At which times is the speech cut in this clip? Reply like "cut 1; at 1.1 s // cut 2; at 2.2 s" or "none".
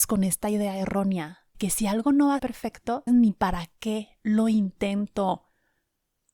cut 1; at 1.5 s // cut 2; at 2.4 s // cut 3; at 3.1 s